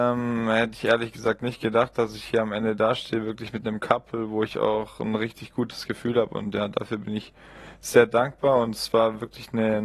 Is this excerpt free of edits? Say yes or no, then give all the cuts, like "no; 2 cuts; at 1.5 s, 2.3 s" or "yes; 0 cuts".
yes; 0 cuts